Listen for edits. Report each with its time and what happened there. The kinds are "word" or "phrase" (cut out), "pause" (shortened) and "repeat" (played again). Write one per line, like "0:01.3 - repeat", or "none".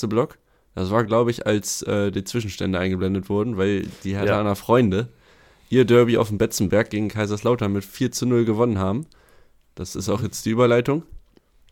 none